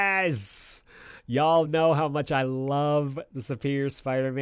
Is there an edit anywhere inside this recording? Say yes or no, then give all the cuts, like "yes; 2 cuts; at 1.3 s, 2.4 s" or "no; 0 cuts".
no; 0 cuts